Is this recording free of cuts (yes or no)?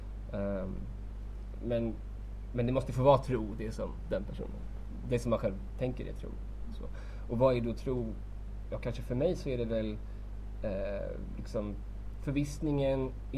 yes